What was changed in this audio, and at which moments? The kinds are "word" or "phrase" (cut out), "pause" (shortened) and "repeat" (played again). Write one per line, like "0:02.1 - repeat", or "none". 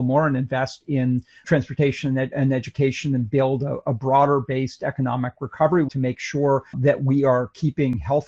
0:01.4 - word
0:02.3 - word
0:05.9 - word
0:06.7 - word